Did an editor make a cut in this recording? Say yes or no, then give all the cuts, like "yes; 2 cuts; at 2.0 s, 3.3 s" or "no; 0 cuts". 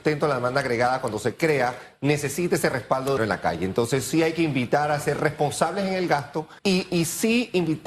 yes; 2 cuts; at 3.2 s, 6.6 s